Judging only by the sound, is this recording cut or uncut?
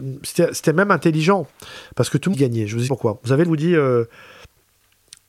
cut